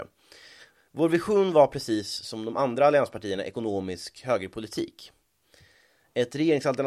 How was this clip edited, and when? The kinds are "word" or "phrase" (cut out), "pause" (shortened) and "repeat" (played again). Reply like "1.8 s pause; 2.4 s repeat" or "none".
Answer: none